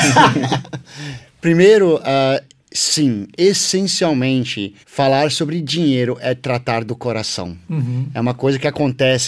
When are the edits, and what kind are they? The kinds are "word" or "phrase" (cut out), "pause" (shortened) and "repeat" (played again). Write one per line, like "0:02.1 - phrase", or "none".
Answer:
0:04.8 - pause